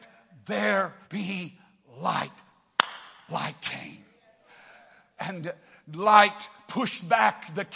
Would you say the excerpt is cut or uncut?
cut